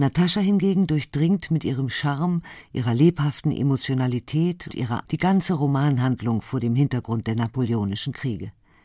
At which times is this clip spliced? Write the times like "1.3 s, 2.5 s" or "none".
4.7 s, 5.1 s